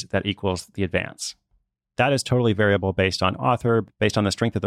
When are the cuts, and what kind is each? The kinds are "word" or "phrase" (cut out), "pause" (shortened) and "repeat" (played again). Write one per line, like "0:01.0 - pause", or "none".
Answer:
none